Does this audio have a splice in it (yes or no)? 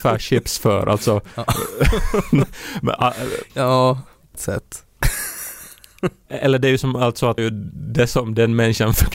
yes